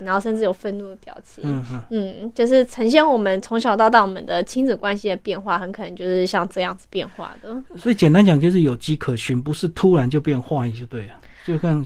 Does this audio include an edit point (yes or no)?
no